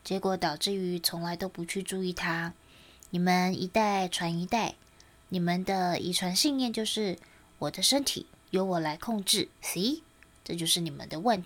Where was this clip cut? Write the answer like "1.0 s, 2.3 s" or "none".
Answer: 9.5 s